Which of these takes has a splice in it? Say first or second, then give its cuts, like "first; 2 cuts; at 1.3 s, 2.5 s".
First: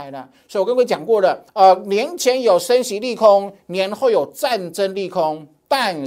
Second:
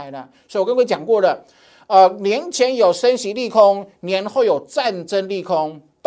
first; 1 cut; at 1.5 s